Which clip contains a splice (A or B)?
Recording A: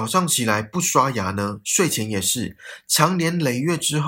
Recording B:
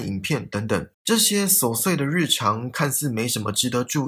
B